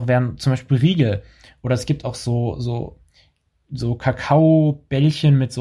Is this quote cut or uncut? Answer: uncut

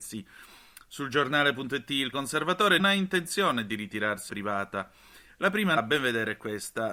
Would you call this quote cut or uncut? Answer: cut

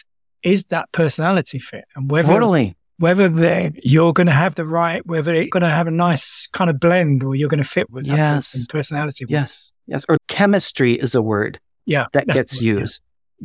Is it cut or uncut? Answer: cut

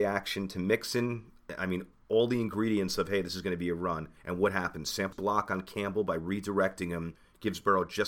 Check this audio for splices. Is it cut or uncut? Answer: cut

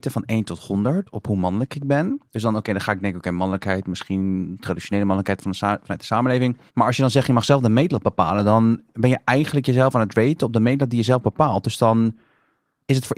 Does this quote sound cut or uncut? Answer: cut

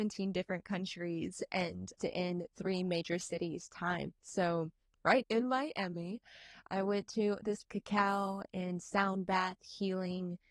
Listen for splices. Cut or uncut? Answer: cut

